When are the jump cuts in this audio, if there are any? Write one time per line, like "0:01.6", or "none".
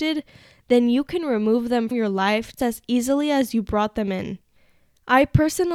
0:01.9
0:02.6